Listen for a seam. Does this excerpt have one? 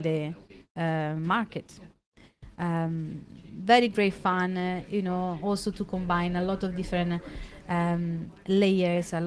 no; 0 cuts

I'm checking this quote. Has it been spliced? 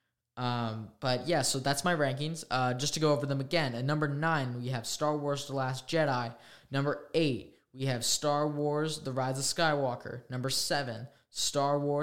no; 0 cuts

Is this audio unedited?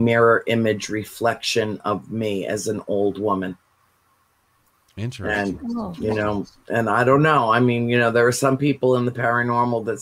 yes; 0 cuts

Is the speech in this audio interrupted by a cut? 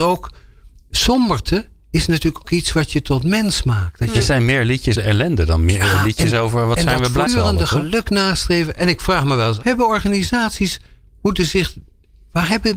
yes; 4 cuts; at 2.4 s, 5.0 s, 7.3 s, 9.6 s

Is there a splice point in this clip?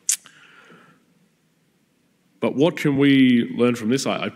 no; 0 cuts

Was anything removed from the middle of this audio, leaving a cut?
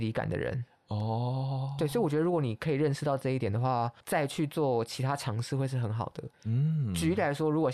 yes; 2 cuts; at 4.0 s, 6.3 s

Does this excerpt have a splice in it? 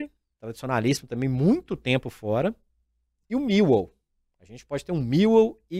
no; 0 cuts

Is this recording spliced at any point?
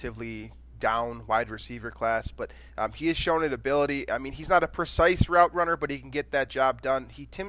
no; 0 cuts

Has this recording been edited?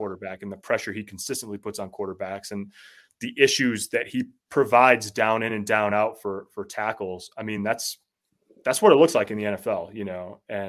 no; 0 cuts

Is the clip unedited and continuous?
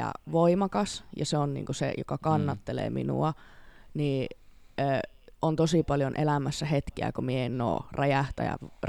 yes; 0 cuts

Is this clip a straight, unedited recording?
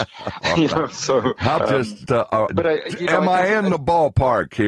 no; 3 cuts; at 1.6 s, 2.0 s, 2.5 s

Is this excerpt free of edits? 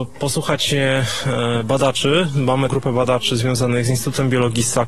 no; 1 cut; at 2.7 s

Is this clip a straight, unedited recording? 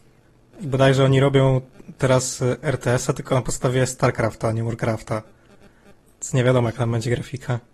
yes; 0 cuts

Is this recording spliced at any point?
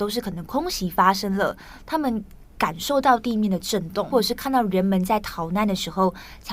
yes; 1 cut; at 4.1 s

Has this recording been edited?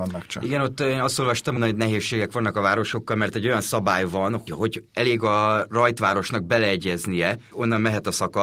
yes; 3 cuts; at 1.6 s, 4.5 s, 7.5 s

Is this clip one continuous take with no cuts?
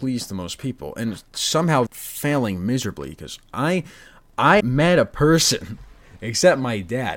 no; 2 cuts; at 1.9 s, 4.6 s

